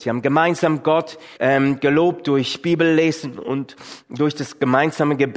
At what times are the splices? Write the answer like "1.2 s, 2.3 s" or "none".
1.3 s, 4.0 s